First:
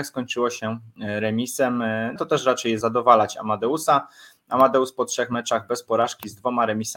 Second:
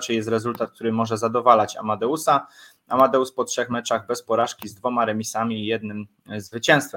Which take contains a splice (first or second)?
first